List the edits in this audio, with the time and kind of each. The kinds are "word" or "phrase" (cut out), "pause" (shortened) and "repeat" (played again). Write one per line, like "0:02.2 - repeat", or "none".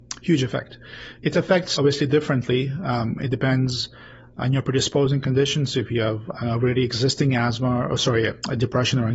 0:01.8 - word